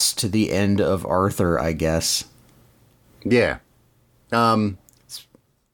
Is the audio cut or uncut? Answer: uncut